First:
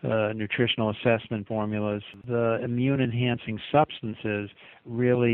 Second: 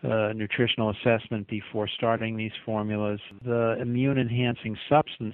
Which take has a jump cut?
first; 1 cut; at 1.5 s

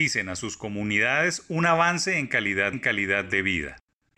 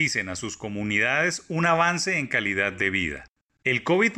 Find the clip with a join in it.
first; 1 cut; at 2.7 s

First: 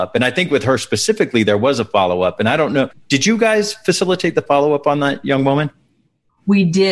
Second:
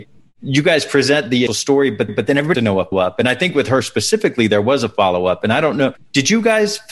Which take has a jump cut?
second; 4 cuts; at 1.5 s, 2.1 s, 2.5 s, 2.9 s

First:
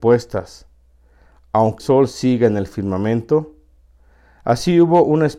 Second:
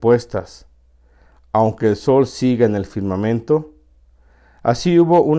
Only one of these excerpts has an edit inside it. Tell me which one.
first; 1 cut; at 1.8 s

